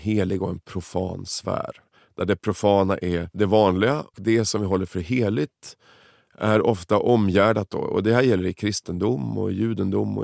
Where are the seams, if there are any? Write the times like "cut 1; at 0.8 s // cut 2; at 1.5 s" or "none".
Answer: cut 1; at 4.1 s